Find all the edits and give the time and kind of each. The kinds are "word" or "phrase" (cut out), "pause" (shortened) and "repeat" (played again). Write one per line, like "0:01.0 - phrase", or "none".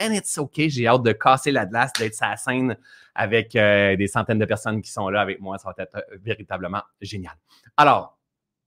none

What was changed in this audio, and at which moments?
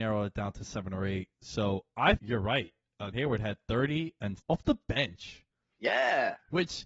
0:02.1 - word
0:03.1 - word
0:04.4 - word

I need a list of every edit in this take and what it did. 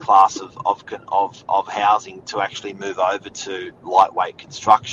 0:03.7 - pause

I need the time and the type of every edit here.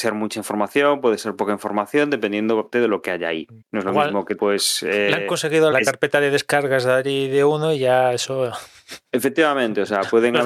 0:02.7 - word
0:03.6 - pause
0:04.4 - word
0:05.7 - word

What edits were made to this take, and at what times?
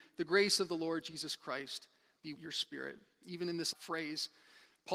0:02.4 - word
0:03.7 - word

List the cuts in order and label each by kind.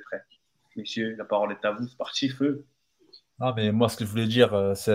none

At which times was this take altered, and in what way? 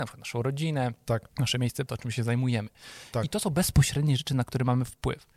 0:01.3 - pause
0:01.9 - word

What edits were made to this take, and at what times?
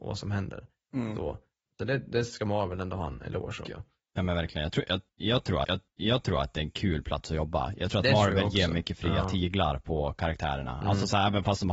0:01.7 - word
0:03.7 - phrase
0:05.6 - repeat

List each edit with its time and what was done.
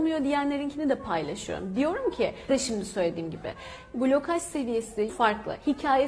0:02.5 - word
0:03.9 - word
0:05.1 - word

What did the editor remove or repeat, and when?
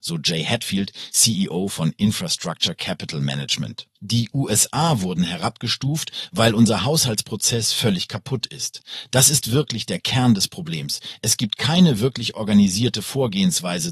0:04.0 - pause

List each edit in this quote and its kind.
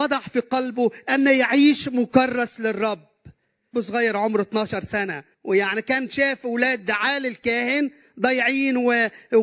0:03.7 - word
0:05.3 - pause

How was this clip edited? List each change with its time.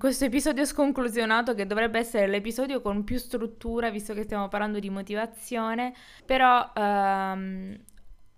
0:06.2 - pause

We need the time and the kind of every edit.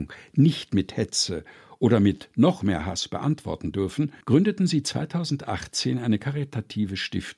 0:04.2 - pause

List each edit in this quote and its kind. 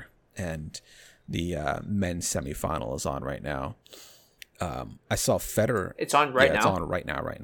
0:04.4 - pause

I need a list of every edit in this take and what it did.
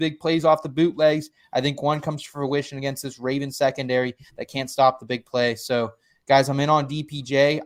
none

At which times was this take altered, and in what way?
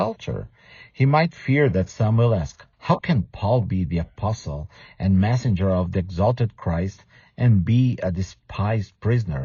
0:02.7 - pause

